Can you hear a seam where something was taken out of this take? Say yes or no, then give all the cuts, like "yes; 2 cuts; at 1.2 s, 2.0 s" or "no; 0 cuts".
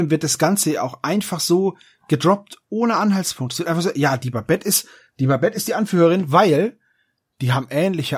no; 0 cuts